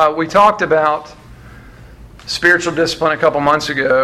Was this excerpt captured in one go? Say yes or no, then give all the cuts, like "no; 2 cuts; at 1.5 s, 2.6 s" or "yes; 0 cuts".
yes; 0 cuts